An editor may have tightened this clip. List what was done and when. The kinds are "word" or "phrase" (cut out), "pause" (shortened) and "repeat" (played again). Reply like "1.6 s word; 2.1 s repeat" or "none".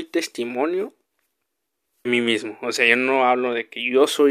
2.1 s word